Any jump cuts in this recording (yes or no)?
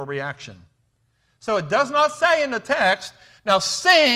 no